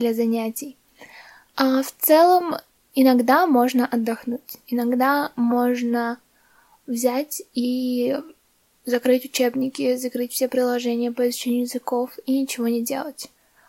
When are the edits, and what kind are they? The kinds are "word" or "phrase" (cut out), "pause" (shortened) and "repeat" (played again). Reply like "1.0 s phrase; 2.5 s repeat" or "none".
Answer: none